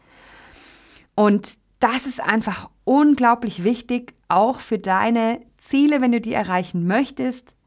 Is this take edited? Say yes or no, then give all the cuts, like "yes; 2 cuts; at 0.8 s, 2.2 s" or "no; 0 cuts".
no; 0 cuts